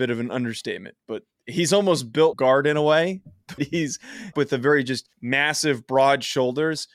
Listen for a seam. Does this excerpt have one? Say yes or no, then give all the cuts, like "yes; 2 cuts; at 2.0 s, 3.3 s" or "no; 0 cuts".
yes; 4 cuts; at 2.3 s, 3.6 s, 4.3 s, 5.1 s